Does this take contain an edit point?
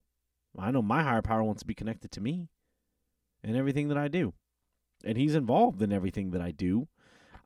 no; 0 cuts

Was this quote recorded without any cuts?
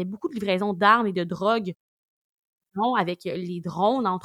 yes; 0 cuts

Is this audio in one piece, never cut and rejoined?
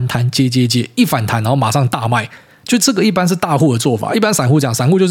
yes; 0 cuts

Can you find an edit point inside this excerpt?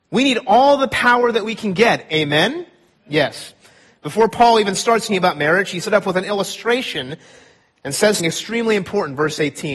yes; 3 cuts; at 5.1 s, 5.8 s, 8.2 s

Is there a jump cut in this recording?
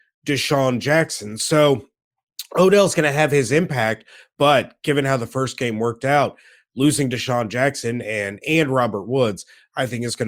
no; 0 cuts

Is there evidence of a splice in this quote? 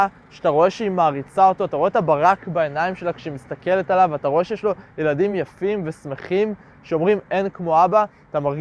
no; 0 cuts

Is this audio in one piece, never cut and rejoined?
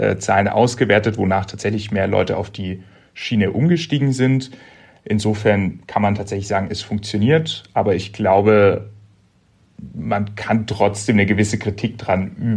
yes; 0 cuts

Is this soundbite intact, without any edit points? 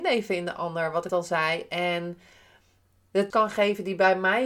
no; 2 cuts; at 1.1 s, 3.3 s

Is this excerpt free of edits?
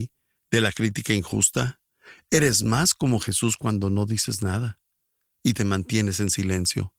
yes; 0 cuts

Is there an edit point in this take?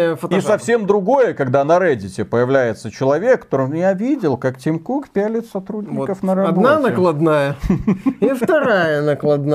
no; 0 cuts

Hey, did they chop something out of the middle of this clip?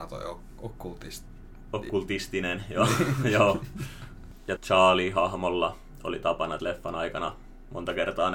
yes; 2 cuts; at 4.6 s, 6.6 s

